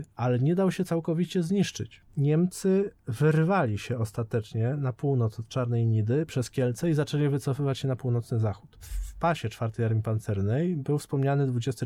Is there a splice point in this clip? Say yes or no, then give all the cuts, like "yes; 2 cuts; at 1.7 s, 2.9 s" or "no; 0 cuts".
yes; 1 cut; at 6.3 s